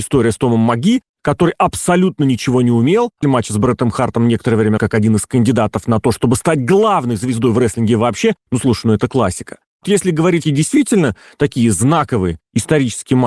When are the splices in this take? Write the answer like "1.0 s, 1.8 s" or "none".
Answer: 3.2 s, 4.8 s, 9.8 s, 10.4 s

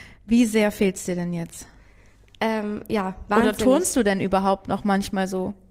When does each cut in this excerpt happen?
none

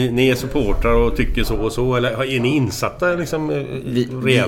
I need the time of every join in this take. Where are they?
none

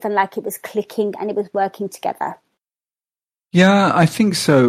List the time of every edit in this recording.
none

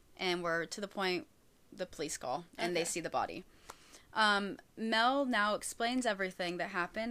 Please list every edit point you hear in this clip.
none

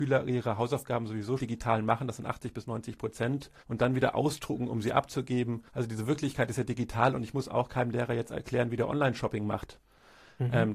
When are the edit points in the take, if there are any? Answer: 1.4 s, 3.6 s, 5.7 s

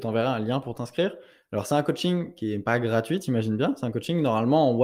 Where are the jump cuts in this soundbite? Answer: none

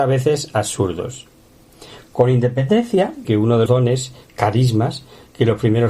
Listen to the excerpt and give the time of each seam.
3.2 s, 3.7 s

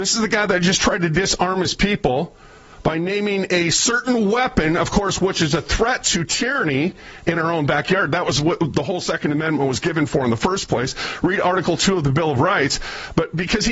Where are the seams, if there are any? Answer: none

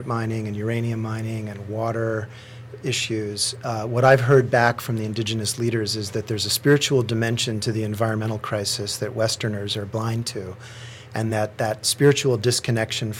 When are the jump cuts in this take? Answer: none

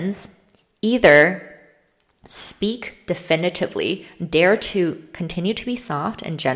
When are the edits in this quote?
none

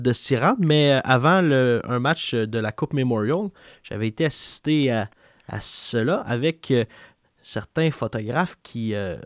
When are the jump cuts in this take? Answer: none

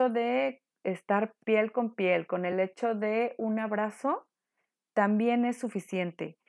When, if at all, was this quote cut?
none

